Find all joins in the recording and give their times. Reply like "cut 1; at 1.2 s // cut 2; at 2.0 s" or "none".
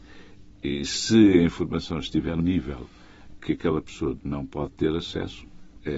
cut 1; at 2.4 s // cut 2; at 3.4 s // cut 3; at 4.2 s